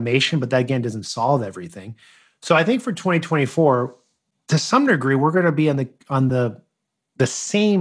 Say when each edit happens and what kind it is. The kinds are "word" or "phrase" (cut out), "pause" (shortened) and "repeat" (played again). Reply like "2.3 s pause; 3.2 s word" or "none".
none